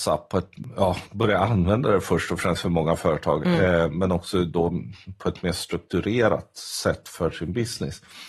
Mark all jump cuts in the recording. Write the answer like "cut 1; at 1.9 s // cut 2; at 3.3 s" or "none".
none